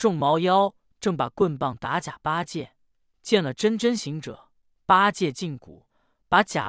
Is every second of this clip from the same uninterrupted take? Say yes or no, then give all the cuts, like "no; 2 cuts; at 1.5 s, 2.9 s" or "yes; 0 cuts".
yes; 0 cuts